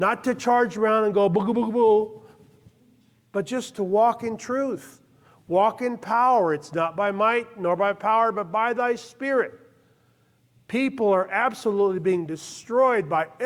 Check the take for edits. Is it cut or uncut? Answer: uncut